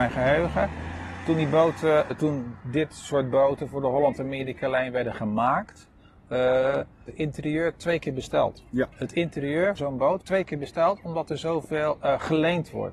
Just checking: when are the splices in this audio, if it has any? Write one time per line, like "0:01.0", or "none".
0:02.1
0:07.1
0:08.9
0:09.8
0:10.2